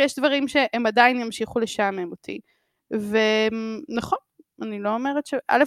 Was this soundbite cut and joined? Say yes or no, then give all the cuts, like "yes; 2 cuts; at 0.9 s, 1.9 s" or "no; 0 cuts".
no; 0 cuts